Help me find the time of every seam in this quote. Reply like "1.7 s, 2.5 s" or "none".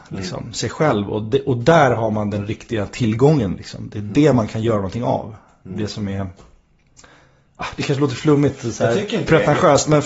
none